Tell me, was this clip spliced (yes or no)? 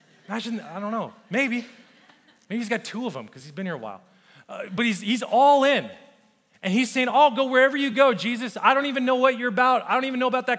no